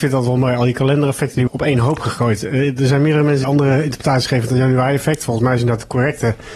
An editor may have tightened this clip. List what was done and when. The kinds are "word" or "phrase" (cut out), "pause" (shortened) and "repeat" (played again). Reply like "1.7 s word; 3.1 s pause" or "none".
1.5 s word; 3.4 s word